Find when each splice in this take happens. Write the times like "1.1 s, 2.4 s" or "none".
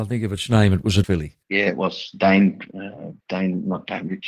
1.0 s, 1.4 s, 3.2 s

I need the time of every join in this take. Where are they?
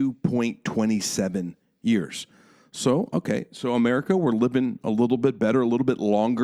none

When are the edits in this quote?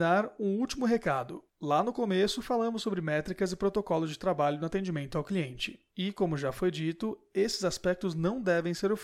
1.5 s, 5.9 s

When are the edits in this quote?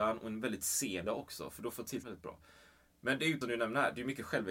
1.1 s, 2.0 s, 3.4 s

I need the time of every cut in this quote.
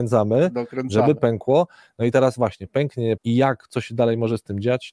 3.2 s

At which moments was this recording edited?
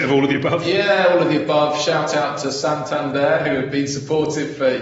none

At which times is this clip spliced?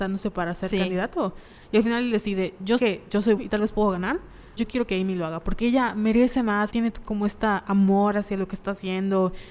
2.8 s, 3.4 s, 4.6 s, 6.7 s

